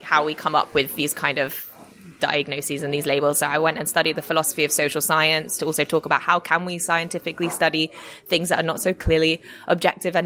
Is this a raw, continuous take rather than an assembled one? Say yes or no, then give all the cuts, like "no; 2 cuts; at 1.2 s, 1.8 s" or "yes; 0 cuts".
yes; 0 cuts